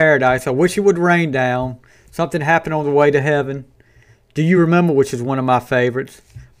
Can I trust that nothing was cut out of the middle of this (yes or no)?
yes